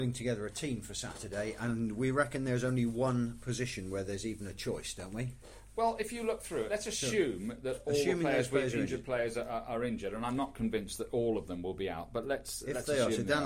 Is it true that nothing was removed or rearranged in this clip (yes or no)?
no